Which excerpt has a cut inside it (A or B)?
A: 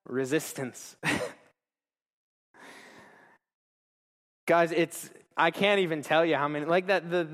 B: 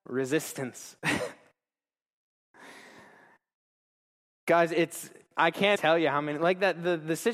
B